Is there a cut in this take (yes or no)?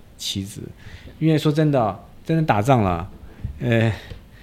no